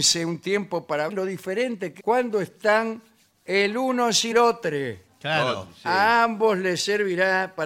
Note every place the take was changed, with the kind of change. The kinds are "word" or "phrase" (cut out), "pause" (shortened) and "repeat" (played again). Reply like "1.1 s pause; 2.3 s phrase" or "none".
1.1 s word; 2.0 s phrase; 4.3 s word